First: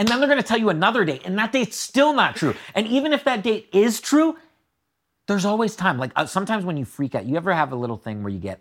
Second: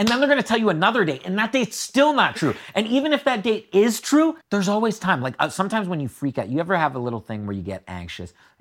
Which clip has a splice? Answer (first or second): second